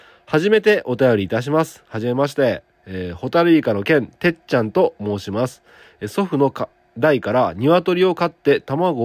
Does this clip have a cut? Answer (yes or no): no